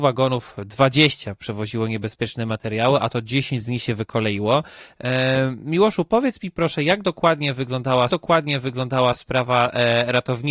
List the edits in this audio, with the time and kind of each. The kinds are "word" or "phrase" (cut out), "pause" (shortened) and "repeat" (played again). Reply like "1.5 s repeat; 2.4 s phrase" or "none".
8.1 s repeat